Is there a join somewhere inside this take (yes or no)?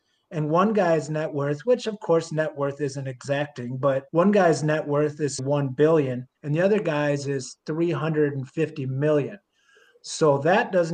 yes